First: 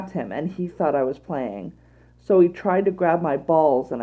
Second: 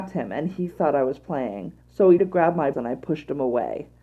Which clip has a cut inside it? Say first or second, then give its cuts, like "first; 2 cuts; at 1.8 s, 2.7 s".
second; 3 cuts; at 1.8 s, 2.2 s, 2.7 s